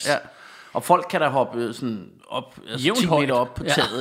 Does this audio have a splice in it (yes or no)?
yes